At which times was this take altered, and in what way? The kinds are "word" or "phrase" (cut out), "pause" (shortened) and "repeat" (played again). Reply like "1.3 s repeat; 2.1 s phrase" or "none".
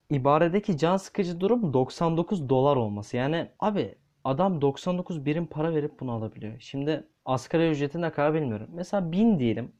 3.6 s pause; 7.2 s pause